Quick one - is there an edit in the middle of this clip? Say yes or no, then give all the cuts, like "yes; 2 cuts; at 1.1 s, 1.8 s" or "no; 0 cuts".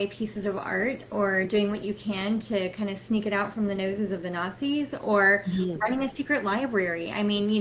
no; 0 cuts